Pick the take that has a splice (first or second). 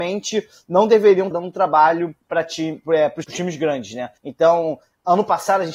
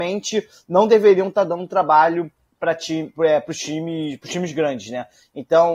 first